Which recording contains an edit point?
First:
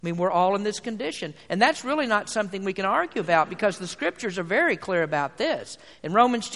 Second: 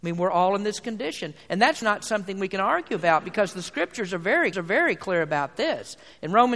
second; 2 cuts; at 1.8 s, 4.5 s

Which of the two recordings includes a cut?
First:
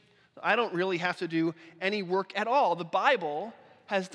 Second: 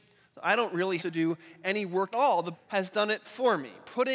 second; 3 cuts; at 1.0 s, 2.1 s, 2.5 s

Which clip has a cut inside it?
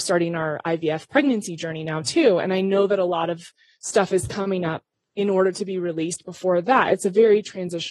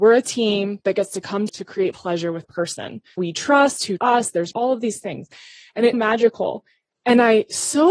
second; 7 cuts; at 1.5 s, 1.9 s, 2.4 s, 3.2 s, 4.0 s, 4.5 s, 5.9 s

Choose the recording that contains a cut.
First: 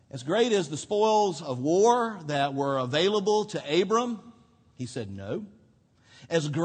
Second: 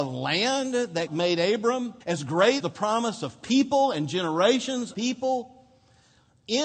second; 4 cuts; at 1.1 s, 2.0 s, 2.6 s, 4.9 s

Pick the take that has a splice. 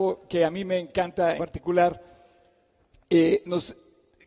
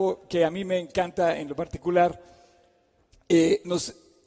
first; 1 cut; at 1.4 s

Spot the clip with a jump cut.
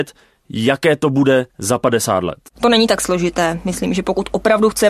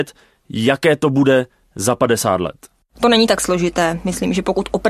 first; 2 cuts; at 1.5 s, 2.5 s

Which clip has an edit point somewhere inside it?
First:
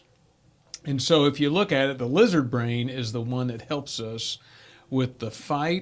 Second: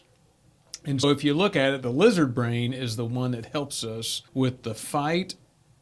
second; 2 cuts; at 1.0 s, 4.3 s

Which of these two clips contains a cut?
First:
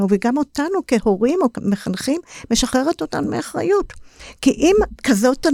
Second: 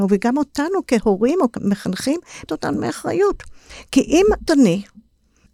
second; 2 cuts; at 2.5 s, 4.5 s

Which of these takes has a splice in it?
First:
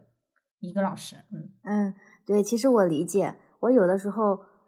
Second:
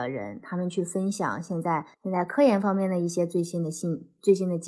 second; 1 cut; at 1.9 s

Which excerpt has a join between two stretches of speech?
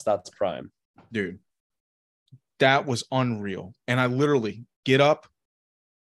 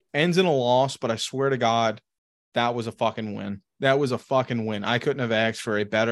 first; 1 cut; at 4.7 s

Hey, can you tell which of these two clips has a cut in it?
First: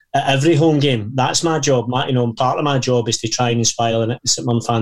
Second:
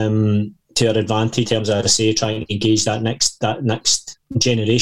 second; 2 cuts; at 1.4 s, 1.8 s

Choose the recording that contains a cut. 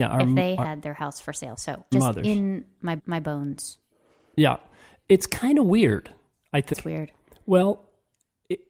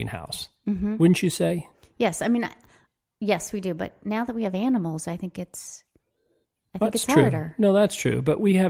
first; 3 cuts; at 1.9 s, 3.0 s, 6.7 s

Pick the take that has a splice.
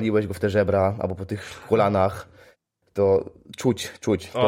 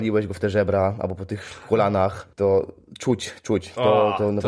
second; 1 cut; at 2.3 s

